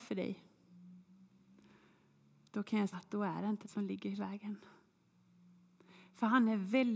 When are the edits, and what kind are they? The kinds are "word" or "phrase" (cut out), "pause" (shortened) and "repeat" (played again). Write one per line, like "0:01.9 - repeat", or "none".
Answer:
0:02.9 - word
0:03.6 - word

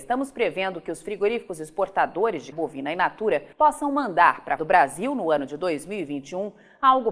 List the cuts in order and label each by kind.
0:02.5 - word
0:03.5 - pause
0:04.6 - word

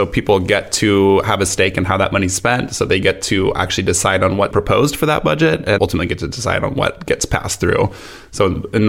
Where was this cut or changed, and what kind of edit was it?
0:04.5 - word
0:05.8 - word

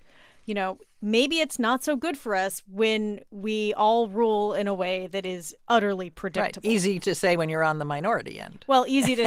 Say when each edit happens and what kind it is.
none

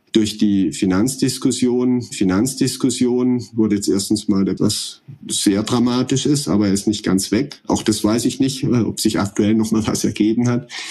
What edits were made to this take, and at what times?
0:02.1 - repeat
0:04.6 - phrase
0:05.2 - word

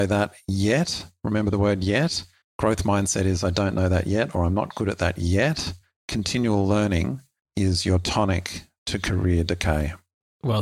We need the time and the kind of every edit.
none

